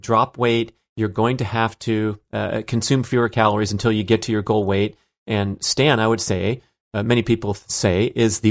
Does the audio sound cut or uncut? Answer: uncut